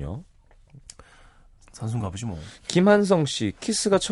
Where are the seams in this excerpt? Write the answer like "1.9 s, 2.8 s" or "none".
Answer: none